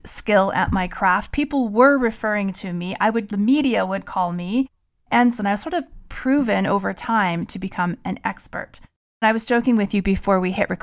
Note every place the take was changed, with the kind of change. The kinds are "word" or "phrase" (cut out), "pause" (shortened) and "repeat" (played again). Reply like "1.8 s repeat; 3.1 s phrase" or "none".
3.3 s word; 5.4 s phrase